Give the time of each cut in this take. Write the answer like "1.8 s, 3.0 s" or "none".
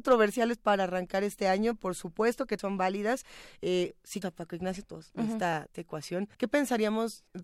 2.6 s, 4.2 s, 4.8 s, 5.7 s, 6.3 s